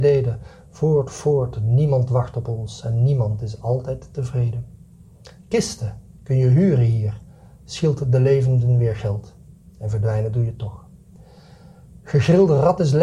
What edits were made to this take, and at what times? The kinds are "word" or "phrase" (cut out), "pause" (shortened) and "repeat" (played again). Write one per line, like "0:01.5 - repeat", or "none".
none